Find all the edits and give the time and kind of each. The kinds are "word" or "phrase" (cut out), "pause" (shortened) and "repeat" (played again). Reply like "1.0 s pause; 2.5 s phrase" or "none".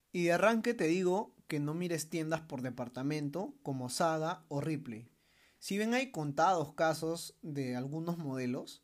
none